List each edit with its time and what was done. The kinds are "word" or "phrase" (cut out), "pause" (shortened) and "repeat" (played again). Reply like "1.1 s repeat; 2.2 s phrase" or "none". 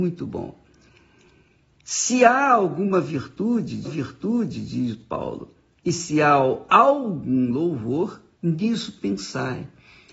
3.8 s repeat; 5.7 s pause; 8.3 s pause